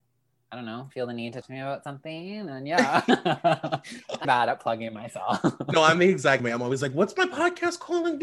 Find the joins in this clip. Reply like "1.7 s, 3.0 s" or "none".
1.4 s, 4.2 s, 6.4 s